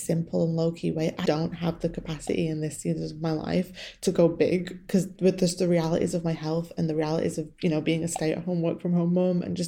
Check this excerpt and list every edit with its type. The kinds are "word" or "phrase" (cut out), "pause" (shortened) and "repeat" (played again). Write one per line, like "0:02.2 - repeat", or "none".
0:01.2 - word